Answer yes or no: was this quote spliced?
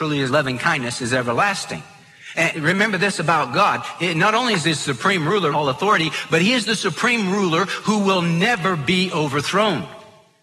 yes